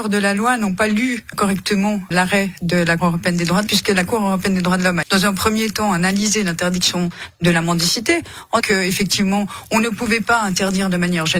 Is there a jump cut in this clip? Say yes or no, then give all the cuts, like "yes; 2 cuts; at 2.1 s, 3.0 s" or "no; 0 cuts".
yes; 6 cuts; at 1.3 s, 2.1 s, 3.0 s, 3.7 s, 5.0 s, 8.6 s